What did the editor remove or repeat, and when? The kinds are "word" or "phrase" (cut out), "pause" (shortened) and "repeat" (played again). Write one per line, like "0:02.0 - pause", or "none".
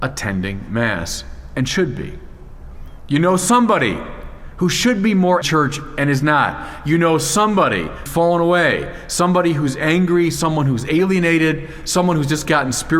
0:05.4 - phrase
0:08.1 - word